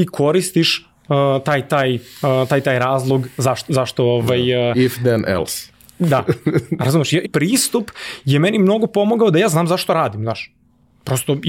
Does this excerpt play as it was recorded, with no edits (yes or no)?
no